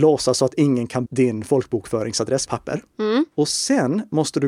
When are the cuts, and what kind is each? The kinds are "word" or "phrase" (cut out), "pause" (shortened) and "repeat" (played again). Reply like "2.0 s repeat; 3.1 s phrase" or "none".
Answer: 1.1 s word; 2.5 s word; 3.3 s pause